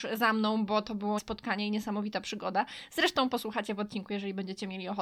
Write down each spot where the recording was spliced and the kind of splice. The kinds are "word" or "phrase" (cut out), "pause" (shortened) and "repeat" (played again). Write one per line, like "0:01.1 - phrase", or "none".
0:01.2 - word